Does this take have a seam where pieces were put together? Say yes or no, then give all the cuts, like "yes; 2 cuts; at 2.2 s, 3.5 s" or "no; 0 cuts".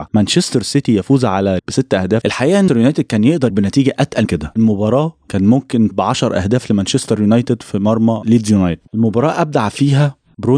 yes; 7 cuts; at 1.6 s, 2.2 s, 2.7 s, 3.5 s, 4.2 s, 5.9 s, 8.9 s